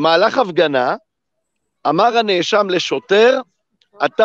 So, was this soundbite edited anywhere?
no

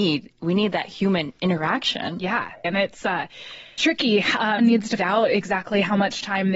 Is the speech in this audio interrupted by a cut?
yes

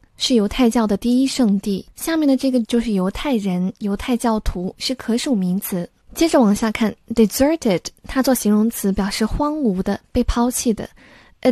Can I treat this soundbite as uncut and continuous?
no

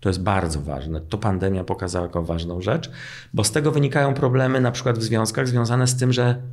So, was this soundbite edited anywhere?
no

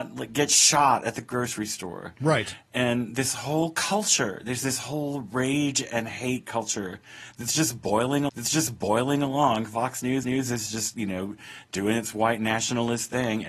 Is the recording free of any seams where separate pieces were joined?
no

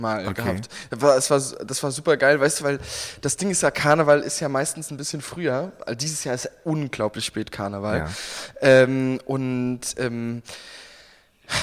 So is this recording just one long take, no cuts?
yes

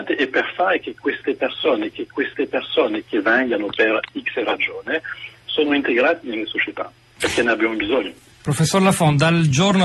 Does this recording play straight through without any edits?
no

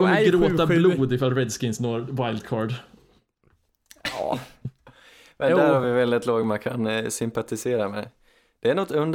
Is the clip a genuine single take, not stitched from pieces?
yes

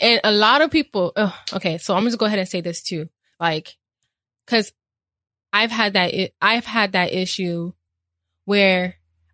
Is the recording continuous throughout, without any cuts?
yes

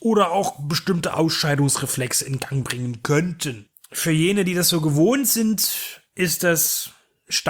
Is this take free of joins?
yes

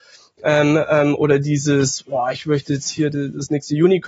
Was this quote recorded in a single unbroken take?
yes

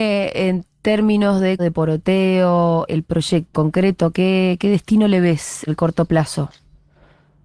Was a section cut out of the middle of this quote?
yes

